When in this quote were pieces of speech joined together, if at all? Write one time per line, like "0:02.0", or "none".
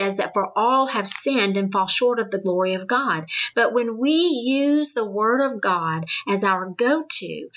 none

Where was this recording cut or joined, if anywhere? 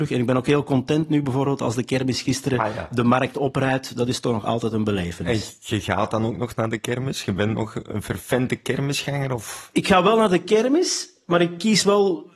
none

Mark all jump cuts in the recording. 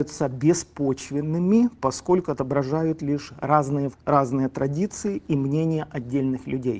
0:03.9

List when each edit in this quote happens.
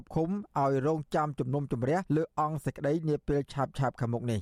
0:02.1

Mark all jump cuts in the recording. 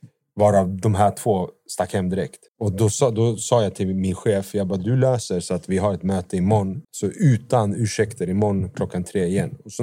0:02.5
0:06.8

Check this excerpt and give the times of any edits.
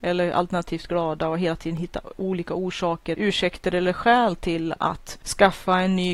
0:03.1

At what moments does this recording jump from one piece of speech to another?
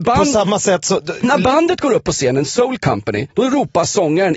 0:03.3

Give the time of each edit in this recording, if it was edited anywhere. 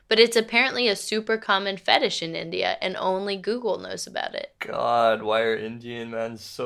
0:04.6

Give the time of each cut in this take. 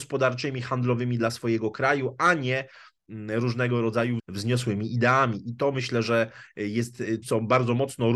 0:04.2
0:07.2

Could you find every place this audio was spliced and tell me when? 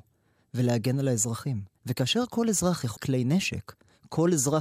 0:01.7
0:03.0

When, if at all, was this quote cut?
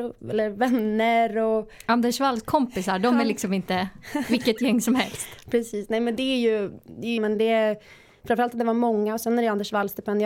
0:07.2

